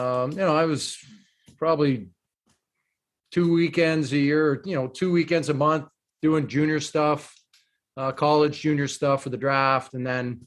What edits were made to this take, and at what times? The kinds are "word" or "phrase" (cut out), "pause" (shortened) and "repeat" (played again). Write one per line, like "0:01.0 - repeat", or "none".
none

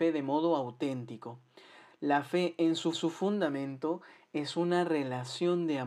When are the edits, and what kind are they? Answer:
0:02.9 - repeat

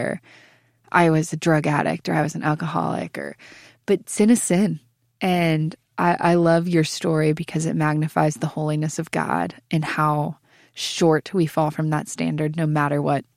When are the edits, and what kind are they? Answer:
none

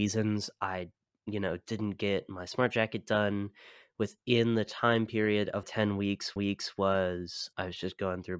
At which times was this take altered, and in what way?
0:05.6 - word
0:06.4 - repeat

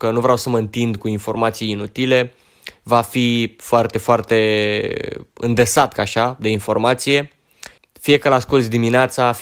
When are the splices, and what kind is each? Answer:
0:06.0 - phrase
0:07.8 - pause

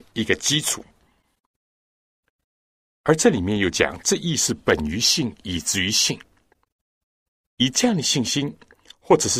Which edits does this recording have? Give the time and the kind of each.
0:06.9 - pause

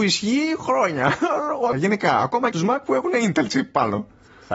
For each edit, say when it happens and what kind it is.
0:01.7 - word
0:02.5 - phrase

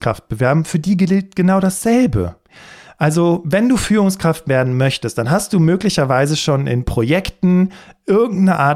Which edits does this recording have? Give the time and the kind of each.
none

